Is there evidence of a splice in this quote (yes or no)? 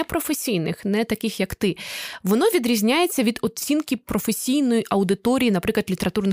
no